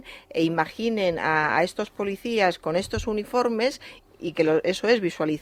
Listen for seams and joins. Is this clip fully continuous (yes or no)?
yes